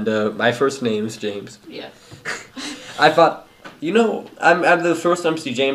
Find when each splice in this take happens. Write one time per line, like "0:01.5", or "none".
none